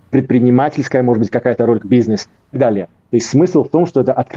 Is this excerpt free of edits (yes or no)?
no